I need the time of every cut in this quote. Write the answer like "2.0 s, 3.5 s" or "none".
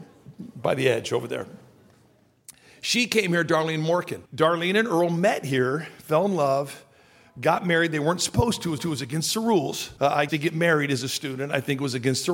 4.3 s, 8.8 s, 10.0 s, 10.3 s